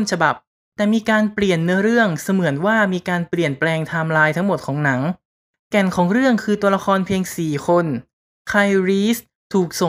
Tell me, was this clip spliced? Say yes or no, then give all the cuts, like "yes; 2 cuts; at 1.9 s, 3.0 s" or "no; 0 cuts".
no; 0 cuts